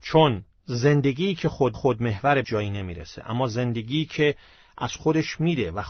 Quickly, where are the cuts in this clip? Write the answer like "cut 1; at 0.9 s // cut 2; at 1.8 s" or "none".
cut 1; at 1.7 s // cut 2; at 2.4 s